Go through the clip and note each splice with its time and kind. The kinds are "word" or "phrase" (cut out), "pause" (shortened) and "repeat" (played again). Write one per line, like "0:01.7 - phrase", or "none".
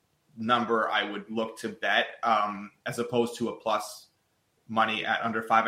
none